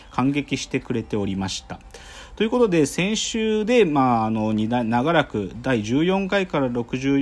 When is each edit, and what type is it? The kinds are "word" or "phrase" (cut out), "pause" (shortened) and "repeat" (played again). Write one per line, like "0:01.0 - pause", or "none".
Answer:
none